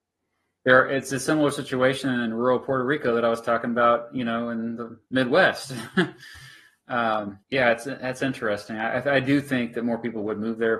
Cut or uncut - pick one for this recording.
cut